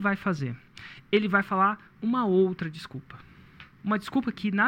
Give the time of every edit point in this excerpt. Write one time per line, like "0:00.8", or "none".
0:03.7